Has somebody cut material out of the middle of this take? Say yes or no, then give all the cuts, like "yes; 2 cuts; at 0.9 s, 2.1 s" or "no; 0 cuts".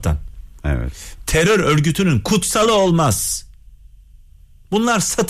no; 0 cuts